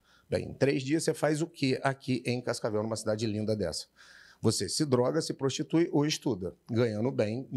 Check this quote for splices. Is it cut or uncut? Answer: uncut